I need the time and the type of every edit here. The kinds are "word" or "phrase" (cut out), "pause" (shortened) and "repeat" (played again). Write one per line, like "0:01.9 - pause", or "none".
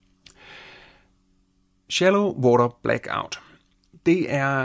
none

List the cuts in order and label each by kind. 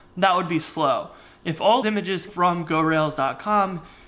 0:01.8 - word
0:02.3 - word

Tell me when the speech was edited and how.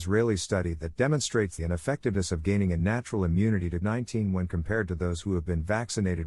0:01.6 - word
0:03.8 - word

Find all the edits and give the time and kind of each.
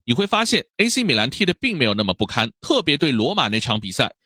0:02.6 - pause

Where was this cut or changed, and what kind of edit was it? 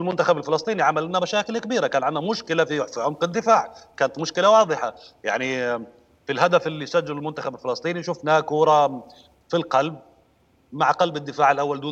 none

